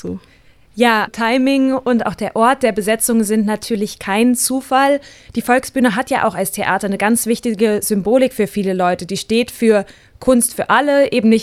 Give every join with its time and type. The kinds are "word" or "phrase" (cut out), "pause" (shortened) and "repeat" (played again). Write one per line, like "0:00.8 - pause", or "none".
0:01.1 - word